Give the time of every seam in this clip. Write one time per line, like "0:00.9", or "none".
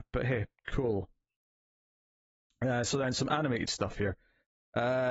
none